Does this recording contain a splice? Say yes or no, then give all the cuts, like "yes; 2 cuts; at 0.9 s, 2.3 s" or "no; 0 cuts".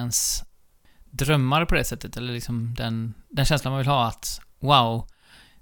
no; 0 cuts